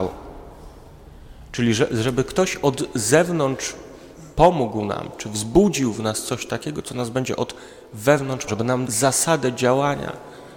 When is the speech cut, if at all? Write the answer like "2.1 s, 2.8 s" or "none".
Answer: 8.5 s, 8.9 s